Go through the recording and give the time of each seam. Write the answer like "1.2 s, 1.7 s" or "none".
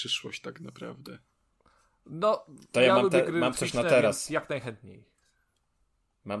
none